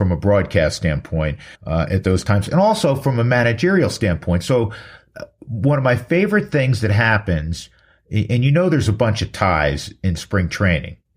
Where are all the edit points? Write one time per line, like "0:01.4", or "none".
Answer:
0:01.5